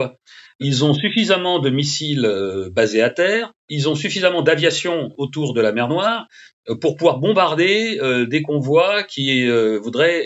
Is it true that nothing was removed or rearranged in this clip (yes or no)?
no